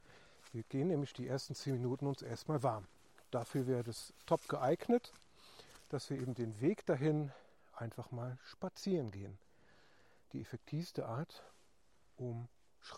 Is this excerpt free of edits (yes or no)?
yes